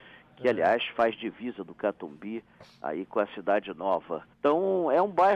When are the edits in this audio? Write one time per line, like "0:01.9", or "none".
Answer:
0:04.3

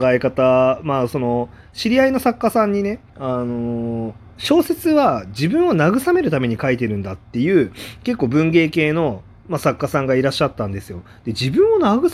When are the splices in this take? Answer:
0:03.1

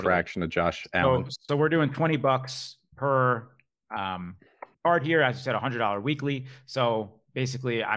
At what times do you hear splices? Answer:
0:01.5
0:04.7

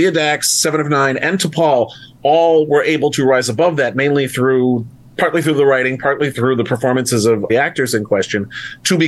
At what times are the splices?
0:07.5

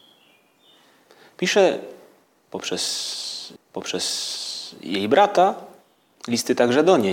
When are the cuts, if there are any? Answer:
0:03.6

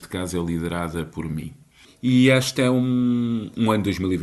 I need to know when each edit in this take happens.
none

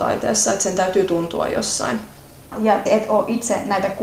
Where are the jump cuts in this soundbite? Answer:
0:02.9

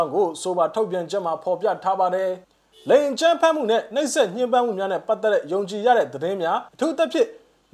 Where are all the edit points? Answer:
0:02.4
0:06.7

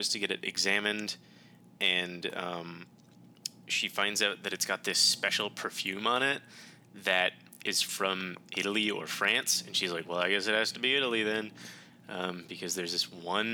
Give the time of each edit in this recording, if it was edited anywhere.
none

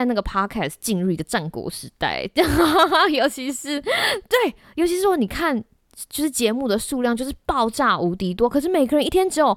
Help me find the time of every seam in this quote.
none

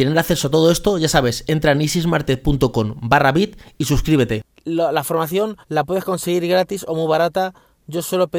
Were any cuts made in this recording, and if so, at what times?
0:05.6

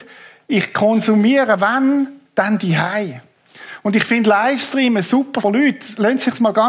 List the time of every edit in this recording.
0:05.4

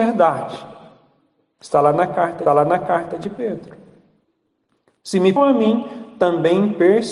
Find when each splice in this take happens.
0:02.5
0:04.2
0:05.4

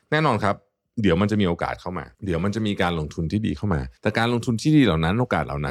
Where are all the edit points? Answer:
0:02.1
0:04.0

